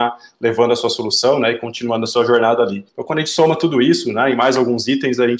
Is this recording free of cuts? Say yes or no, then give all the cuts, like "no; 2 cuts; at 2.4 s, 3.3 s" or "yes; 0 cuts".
no; 1 cut; at 2.9 s